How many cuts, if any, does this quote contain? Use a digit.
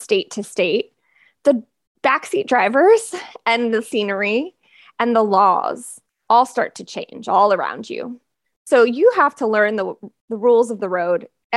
0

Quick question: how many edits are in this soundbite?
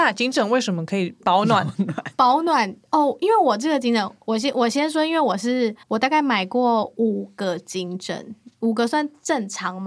1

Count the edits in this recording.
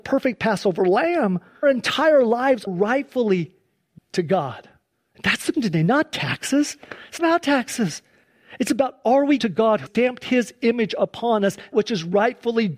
8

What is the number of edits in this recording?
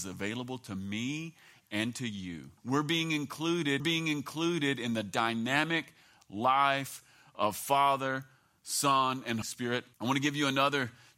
4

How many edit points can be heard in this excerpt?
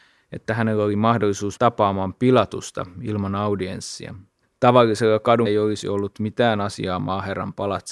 3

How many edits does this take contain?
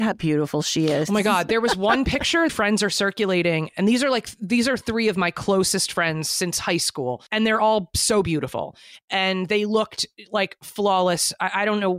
2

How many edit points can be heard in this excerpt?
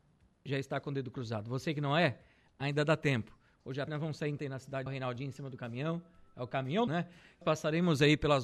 5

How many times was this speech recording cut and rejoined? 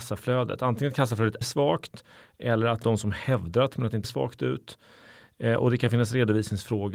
4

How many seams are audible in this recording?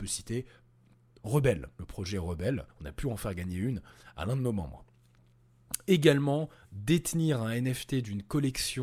2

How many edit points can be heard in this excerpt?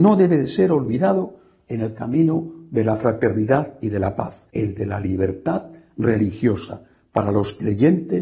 1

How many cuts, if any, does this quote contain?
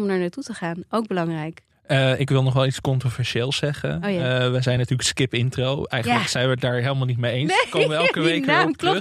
0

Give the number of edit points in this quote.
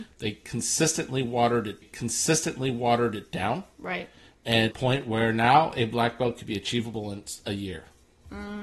2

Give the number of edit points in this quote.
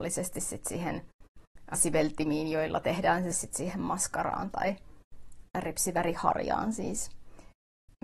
2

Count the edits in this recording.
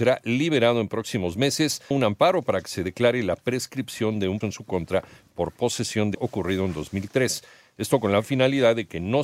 3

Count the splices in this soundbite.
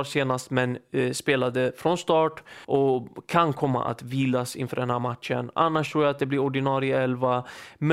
1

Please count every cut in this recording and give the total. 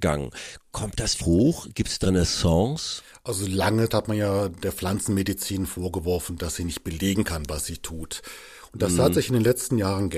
3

